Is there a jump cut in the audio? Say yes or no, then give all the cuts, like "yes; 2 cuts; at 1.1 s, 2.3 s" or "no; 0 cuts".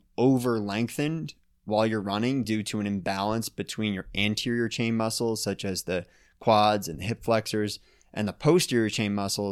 no; 0 cuts